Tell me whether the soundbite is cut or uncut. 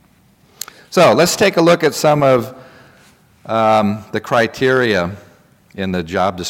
uncut